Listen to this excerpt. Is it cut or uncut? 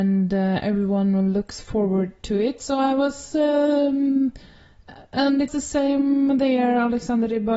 cut